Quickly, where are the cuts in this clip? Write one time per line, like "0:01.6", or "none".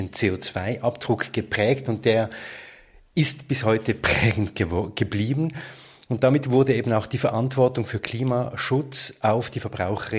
none

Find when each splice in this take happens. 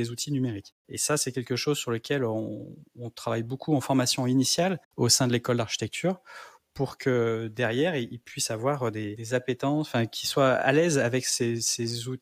0:04.9

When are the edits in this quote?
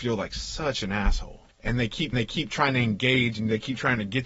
0:01.5
0:02.1

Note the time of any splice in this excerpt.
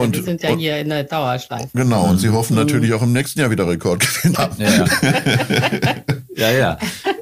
0:04.3

